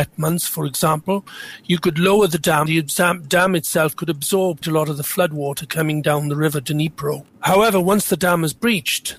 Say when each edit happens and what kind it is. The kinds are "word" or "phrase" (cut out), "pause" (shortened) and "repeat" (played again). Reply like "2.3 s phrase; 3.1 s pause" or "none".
2.7 s word; 4.6 s word; 7.3 s pause